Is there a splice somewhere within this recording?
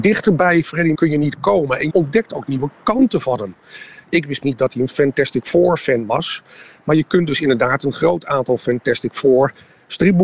yes; 3 cuts; at 0.9 s, 1.9 s, 4.4 s

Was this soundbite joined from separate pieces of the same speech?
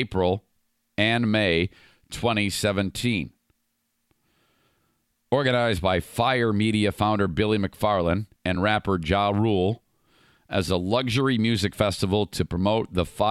no; 0 cuts

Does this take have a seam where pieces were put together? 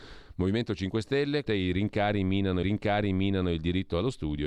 yes; 2 cuts; at 1.5 s, 2.6 s

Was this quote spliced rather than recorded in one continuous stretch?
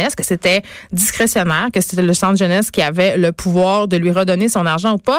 no; 0 cuts

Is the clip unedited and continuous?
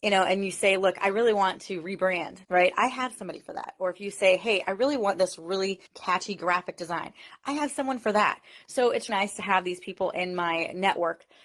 no; 3 cuts; at 2.4 s, 5.9 s, 9.1 s

